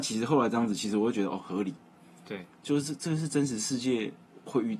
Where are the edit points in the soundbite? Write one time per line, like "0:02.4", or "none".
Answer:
none